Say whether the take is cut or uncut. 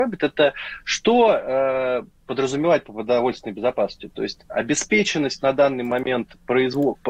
uncut